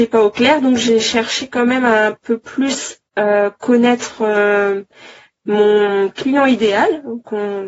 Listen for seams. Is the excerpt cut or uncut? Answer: cut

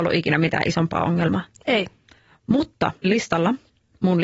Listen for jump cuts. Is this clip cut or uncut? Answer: cut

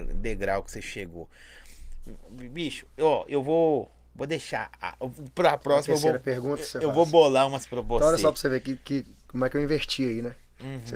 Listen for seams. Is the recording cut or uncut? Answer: uncut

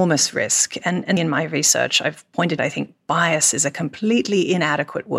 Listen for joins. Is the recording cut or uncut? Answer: cut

